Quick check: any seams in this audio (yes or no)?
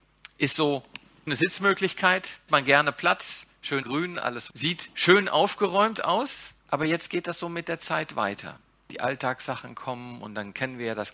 yes